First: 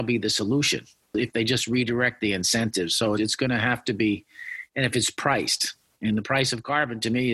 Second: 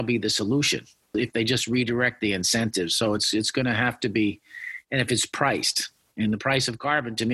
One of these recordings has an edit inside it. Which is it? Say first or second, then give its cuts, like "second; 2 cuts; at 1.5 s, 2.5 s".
first; 1 cut; at 3.2 s